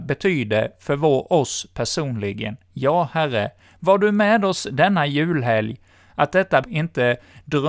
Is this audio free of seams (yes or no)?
no